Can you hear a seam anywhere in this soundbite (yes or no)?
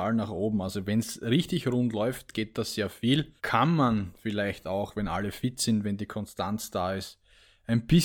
yes